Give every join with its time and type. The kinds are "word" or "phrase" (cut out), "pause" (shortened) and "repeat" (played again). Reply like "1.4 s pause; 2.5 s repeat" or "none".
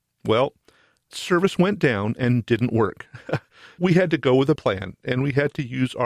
1.1 s word; 3.8 s word; 4.6 s word